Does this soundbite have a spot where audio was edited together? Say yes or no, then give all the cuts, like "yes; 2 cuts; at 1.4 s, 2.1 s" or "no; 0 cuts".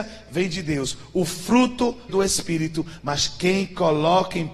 yes; 1 cut; at 2.1 s